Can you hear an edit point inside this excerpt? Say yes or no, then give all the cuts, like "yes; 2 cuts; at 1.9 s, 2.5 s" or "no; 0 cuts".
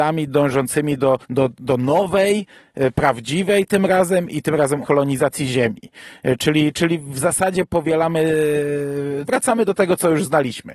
yes; 3 cuts; at 1.2 s, 4.8 s, 9.3 s